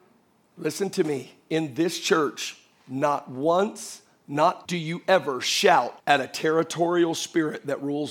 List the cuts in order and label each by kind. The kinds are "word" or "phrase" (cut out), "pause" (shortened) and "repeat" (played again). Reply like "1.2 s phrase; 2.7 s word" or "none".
4.7 s word; 6.0 s pause

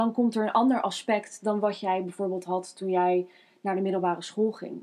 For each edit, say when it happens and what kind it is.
none

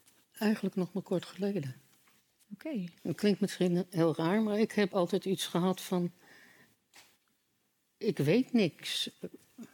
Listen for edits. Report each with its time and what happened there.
3.0 s pause; 4.9 s word

